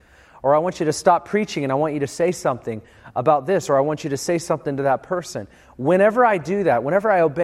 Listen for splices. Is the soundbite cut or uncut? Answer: uncut